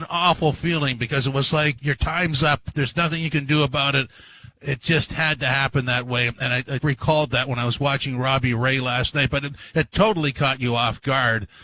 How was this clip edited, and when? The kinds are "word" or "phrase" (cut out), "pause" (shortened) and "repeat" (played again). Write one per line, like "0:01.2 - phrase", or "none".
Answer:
0:01.8 - word
0:06.8 - word